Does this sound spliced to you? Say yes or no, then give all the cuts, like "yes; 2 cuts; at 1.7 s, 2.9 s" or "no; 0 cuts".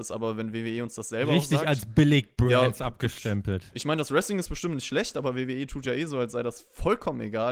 no; 0 cuts